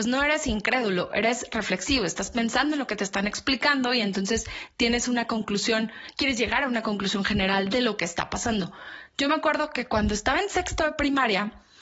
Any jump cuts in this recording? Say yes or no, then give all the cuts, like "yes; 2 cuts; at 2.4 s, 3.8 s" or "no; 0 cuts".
no; 0 cuts